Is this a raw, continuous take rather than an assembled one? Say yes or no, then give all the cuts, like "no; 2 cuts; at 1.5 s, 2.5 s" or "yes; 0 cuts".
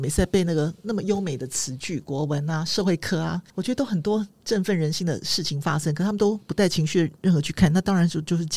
no; 1 cut; at 3.5 s